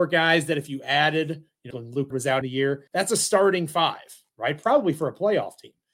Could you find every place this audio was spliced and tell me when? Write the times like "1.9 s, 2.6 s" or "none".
1.7 s, 2.1 s, 2.4 s, 2.9 s